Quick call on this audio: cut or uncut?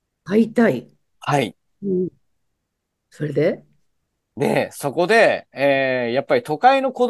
uncut